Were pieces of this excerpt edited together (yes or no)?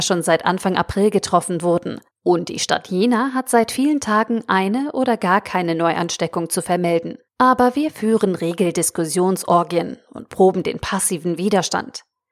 yes